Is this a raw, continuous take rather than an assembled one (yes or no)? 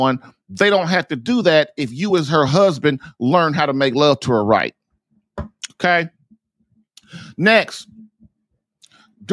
yes